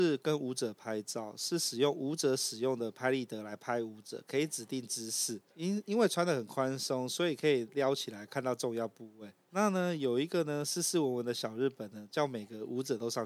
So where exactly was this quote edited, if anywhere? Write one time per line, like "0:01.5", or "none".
0:05.5
0:09.4